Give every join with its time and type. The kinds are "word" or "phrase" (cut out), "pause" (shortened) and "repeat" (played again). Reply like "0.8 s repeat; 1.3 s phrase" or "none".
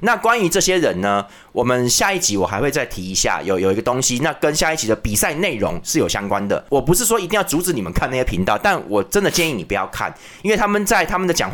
none